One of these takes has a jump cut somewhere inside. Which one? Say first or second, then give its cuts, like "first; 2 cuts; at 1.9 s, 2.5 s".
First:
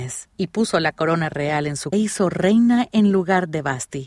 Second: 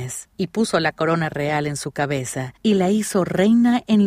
first; 1 cut; at 1.9 s